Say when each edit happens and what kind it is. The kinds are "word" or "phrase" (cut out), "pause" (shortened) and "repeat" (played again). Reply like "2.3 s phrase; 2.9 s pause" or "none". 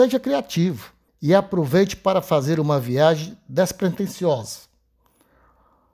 1.1 s pause